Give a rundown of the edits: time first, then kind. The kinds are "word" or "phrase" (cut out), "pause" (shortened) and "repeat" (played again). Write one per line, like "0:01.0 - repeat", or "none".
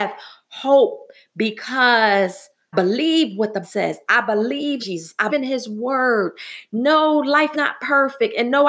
0:02.7 - word
0:03.6 - word
0:04.8 - word
0:05.3 - word
0:07.5 - word

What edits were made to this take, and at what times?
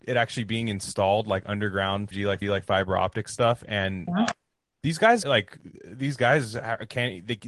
0:02.1 - word
0:02.4 - repeat
0:04.1 - word
0:05.2 - phrase
0:05.8 - pause

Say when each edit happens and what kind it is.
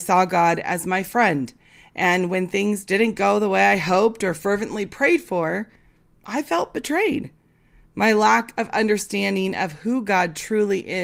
none

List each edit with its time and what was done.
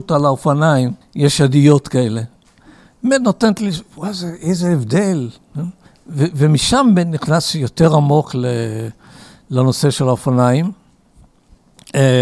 0:01.0 - pause
0:05.9 - pause

